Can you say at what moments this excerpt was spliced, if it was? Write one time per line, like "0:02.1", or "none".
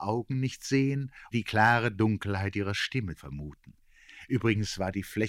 0:01.3
0:03.2